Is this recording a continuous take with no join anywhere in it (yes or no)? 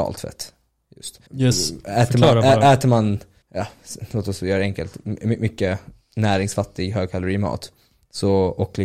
no